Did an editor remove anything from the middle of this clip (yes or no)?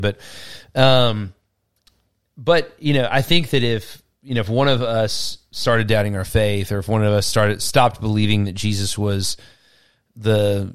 no